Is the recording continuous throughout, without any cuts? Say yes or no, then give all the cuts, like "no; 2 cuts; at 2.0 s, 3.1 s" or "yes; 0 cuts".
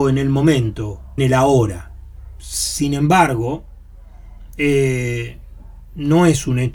no; 1 cut; at 1.2 s